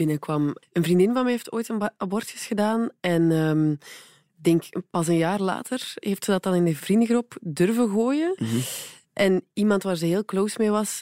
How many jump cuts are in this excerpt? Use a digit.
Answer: 0